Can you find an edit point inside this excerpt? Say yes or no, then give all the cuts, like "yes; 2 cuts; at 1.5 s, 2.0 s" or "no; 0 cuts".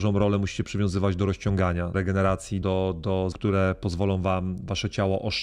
yes; 3 cuts; at 1.9 s, 2.6 s, 3.3 s